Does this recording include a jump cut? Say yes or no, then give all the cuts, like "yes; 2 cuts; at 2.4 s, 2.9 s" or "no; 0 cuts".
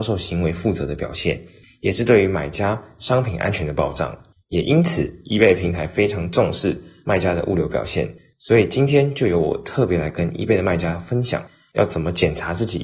no; 0 cuts